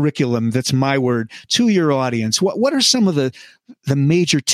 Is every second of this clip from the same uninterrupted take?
yes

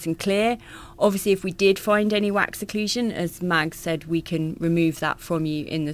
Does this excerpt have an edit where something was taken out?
no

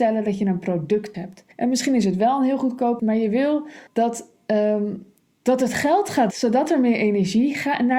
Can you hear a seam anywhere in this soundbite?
yes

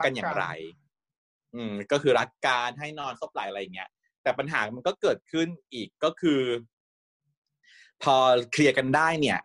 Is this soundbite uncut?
yes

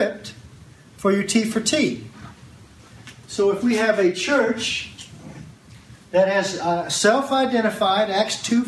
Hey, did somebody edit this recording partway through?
no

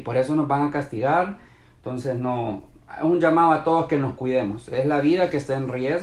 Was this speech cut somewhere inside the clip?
no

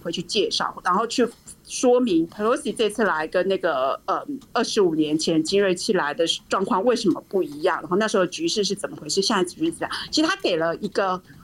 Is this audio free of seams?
no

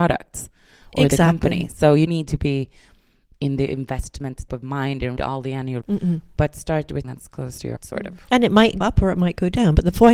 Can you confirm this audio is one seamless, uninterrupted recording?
no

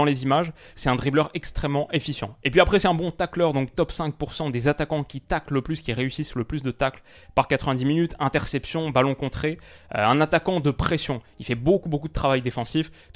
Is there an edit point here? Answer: no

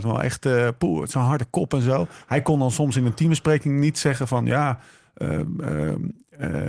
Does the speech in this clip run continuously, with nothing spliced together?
yes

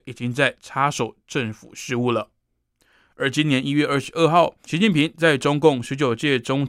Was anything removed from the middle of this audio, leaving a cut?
no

